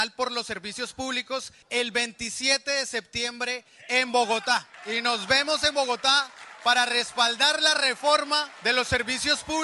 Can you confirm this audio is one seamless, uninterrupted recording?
no; 2 cuts; at 4.7 s, 8.6 s

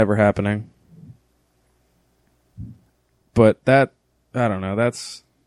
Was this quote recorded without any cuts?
yes; 0 cuts

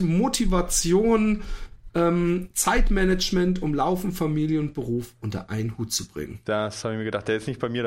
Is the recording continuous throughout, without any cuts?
yes; 0 cuts

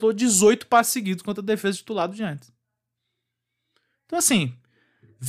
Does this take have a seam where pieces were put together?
no; 0 cuts

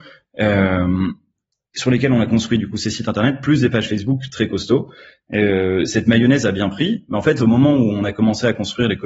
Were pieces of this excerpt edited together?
no; 0 cuts

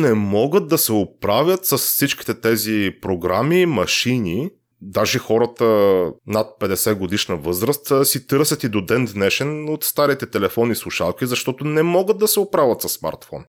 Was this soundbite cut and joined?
no; 0 cuts

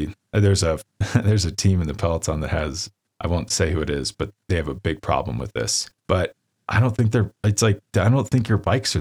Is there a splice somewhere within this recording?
yes; 2 cuts; at 3.0 s, 6.0 s

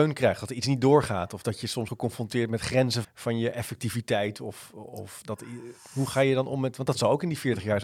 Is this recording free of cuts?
no; 2 cuts; at 1.9 s, 3.0 s

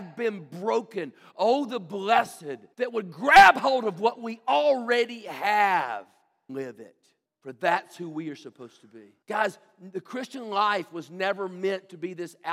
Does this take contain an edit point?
yes; 4 cuts; at 2.7 s, 6.5 s, 7.3 s, 9.2 s

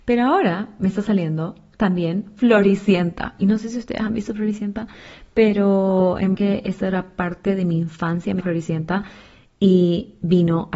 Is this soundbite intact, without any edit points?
no; 2 cuts; at 6.3 s, 8.4 s

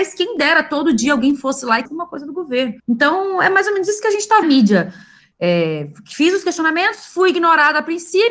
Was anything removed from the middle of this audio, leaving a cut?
yes; 3 cuts; at 1.9 s, 2.8 s, 4.4 s

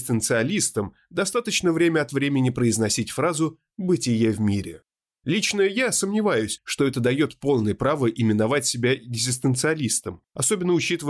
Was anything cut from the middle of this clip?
no; 0 cuts

